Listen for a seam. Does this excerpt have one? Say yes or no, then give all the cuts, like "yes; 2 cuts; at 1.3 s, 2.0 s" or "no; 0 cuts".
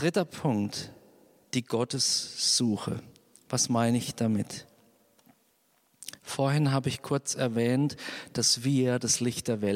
no; 0 cuts